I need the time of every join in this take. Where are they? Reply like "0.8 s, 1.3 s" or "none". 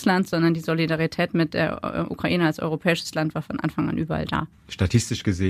none